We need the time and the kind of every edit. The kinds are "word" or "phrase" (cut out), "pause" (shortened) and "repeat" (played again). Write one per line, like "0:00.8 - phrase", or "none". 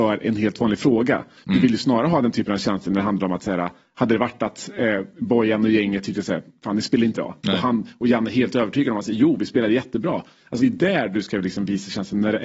0:07.1 - word
0:10.6 - word